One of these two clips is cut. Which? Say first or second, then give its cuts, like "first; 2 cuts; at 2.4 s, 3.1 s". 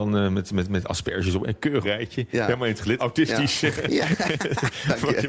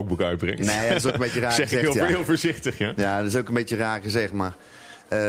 first; 2 cuts; at 1.8 s, 3.0 s